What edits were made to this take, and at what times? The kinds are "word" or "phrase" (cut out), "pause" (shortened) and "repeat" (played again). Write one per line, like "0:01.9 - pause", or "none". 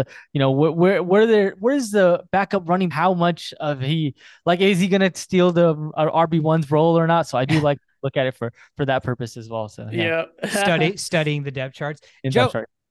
0:02.9 - phrase